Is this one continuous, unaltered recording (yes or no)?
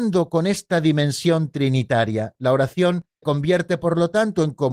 no